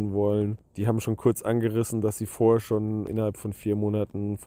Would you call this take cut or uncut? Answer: uncut